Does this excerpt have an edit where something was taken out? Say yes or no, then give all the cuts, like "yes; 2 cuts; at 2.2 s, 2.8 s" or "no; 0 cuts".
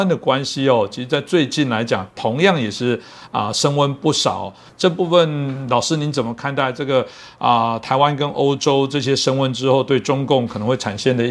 no; 0 cuts